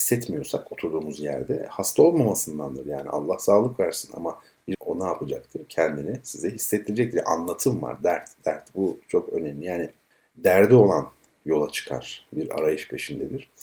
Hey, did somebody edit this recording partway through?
yes; 2 cuts; at 4.7 s, 10.1 s

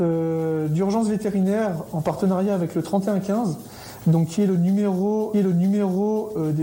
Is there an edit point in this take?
yes; 1 cut; at 5.3 s

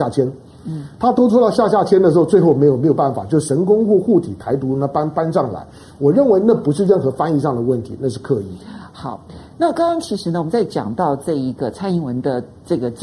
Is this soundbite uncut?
yes; 0 cuts

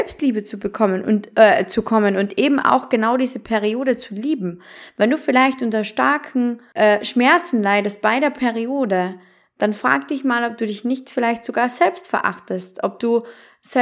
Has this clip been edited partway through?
no; 0 cuts

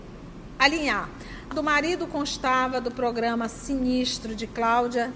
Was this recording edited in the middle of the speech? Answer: yes; 1 cut; at 1.5 s

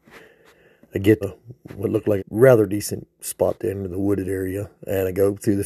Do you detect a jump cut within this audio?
yes; 2 cuts; at 1.2 s, 2.2 s

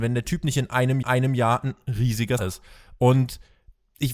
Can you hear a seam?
yes; 2 cuts; at 1.0 s, 2.4 s

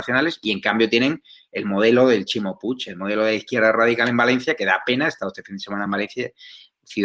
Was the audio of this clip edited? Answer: no; 0 cuts

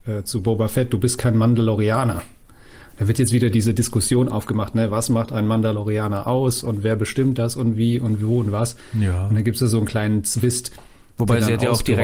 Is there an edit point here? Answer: no; 0 cuts

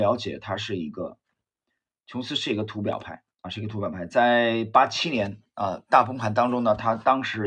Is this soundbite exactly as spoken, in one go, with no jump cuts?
no; 1 cut; at 3.3 s

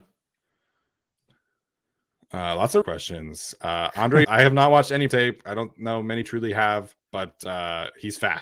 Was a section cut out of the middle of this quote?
yes; 5 cuts; at 2.8 s, 4.2 s, 5.1 s, 6.2 s, 7.0 s

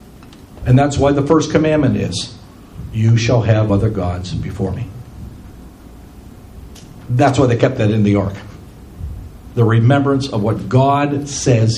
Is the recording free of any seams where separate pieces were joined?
no; 1 cut; at 3.7 s

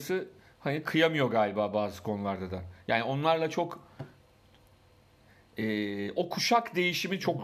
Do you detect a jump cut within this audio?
no; 0 cuts

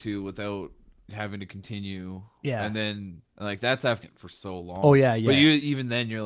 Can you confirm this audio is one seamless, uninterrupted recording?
no; 2 cuts; at 3.3 s, 4.0 s

